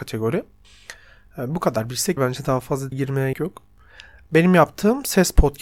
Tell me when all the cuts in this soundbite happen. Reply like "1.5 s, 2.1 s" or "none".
2.2 s, 2.9 s, 3.3 s